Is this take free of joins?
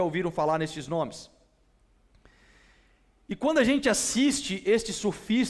yes; 0 cuts

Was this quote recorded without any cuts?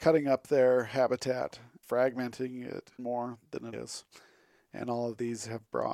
no; 3 cuts; at 1.8 s, 3.0 s, 3.7 s

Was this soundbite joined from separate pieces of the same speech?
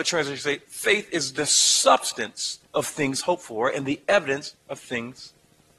yes; 2 cuts; at 2.6 s, 4.6 s

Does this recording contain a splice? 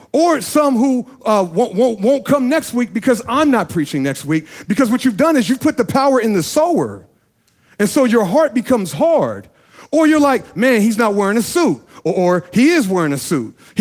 no; 0 cuts

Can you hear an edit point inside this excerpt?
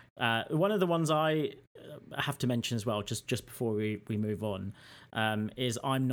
no; 0 cuts

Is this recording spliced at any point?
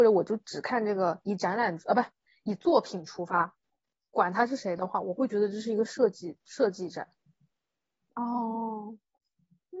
no; 0 cuts

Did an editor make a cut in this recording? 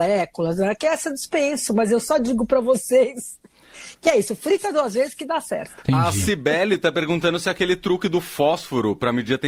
no; 0 cuts

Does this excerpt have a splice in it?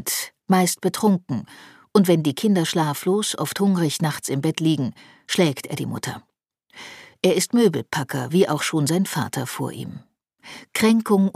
no; 0 cuts

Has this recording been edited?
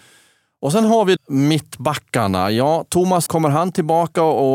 yes; 2 cuts; at 1.2 s, 3.3 s

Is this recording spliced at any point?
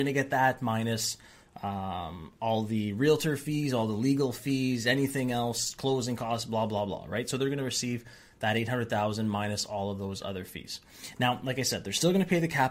no; 0 cuts

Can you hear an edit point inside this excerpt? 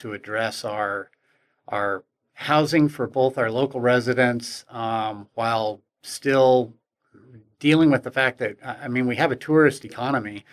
no; 0 cuts

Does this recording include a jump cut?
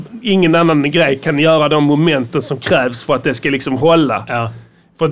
no; 0 cuts

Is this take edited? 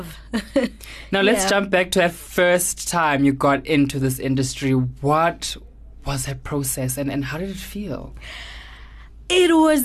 no; 0 cuts

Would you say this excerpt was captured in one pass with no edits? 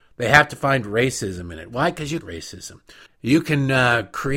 no; 2 cuts; at 2.2 s, 3.1 s

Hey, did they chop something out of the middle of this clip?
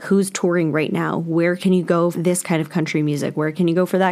yes; 1 cut; at 2.1 s

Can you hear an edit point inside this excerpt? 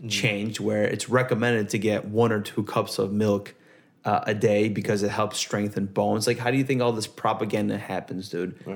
no; 0 cuts

